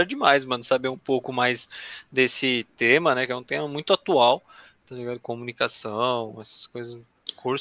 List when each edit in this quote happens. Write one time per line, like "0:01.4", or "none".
none